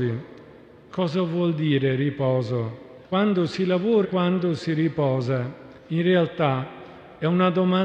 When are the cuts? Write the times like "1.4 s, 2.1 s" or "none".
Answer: 3.0 s, 4.0 s, 5.8 s